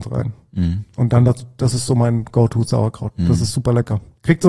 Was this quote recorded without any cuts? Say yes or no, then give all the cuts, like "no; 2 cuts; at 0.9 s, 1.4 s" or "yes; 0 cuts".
yes; 0 cuts